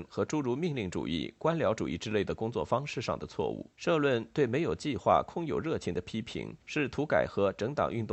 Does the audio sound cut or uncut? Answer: cut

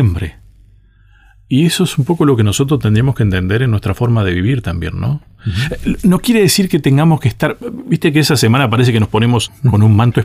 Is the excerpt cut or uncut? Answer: uncut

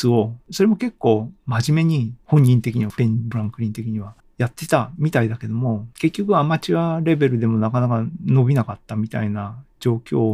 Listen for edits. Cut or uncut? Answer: cut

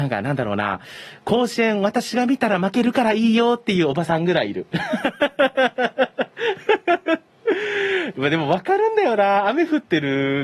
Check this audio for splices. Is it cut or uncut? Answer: uncut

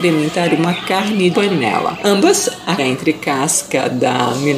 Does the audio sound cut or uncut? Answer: cut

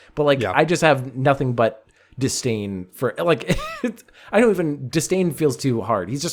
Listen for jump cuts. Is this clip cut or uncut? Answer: uncut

